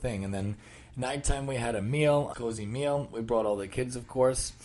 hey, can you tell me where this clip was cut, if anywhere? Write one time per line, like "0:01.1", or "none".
0:02.3